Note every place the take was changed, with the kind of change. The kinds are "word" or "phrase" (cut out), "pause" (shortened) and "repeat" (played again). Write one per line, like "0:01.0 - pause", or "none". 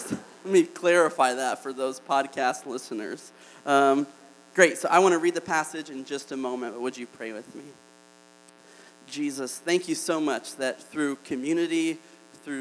none